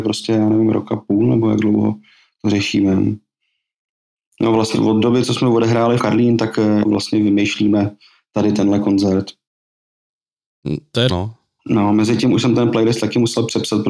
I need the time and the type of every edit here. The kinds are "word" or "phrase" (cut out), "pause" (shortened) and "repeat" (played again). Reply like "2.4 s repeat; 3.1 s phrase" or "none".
4.7 s word; 6.0 s word; 6.8 s word; 11.1 s word